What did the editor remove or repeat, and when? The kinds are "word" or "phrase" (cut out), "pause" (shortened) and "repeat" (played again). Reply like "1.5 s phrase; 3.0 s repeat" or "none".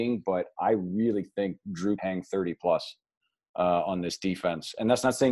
2.0 s word